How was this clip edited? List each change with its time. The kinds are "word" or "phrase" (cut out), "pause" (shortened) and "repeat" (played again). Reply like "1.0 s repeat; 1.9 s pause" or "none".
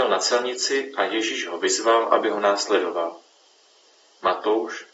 none